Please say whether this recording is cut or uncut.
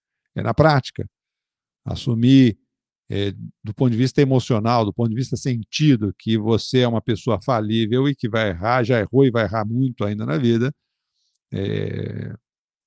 uncut